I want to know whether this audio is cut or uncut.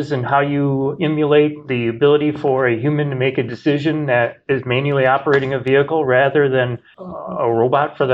uncut